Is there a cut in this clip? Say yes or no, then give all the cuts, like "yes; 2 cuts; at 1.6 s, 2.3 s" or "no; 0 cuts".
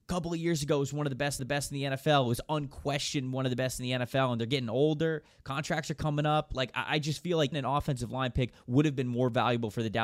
yes; 2 cuts; at 1.4 s, 7.5 s